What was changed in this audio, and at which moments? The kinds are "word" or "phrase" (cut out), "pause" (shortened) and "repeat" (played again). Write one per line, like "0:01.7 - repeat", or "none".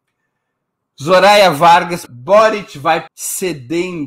0:02.1 - word
0:03.1 - phrase